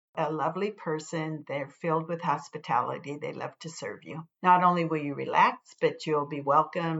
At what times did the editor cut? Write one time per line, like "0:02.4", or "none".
none